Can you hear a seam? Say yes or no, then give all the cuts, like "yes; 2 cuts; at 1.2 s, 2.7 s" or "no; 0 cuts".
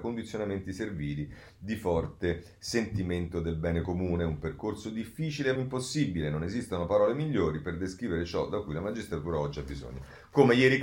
yes; 1 cut; at 5.6 s